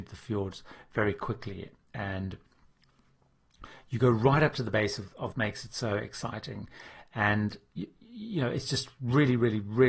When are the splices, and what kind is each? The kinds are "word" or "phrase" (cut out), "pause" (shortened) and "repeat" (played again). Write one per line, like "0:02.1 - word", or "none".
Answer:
0:05.3 - phrase